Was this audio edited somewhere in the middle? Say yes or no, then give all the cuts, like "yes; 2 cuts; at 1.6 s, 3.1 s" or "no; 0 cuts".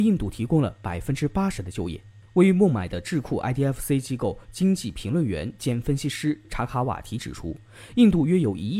no; 0 cuts